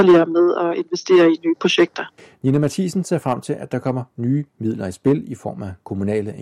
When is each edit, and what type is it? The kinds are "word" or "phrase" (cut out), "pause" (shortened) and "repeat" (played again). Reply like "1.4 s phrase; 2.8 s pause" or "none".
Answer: 2.2 s pause